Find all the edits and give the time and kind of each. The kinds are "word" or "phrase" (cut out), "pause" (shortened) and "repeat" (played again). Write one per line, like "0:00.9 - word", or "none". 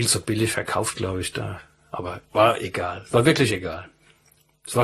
none